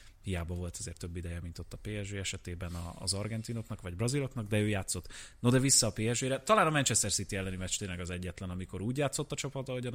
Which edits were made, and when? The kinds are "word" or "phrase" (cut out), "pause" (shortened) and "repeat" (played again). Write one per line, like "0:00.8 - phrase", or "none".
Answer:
none